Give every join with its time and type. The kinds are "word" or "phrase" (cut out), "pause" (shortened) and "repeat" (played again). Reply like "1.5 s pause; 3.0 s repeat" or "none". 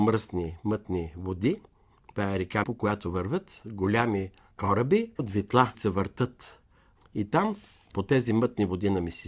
2.6 s word; 5.2 s word; 5.7 s word